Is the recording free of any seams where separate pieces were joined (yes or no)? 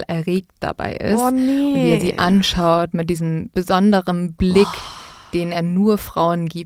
yes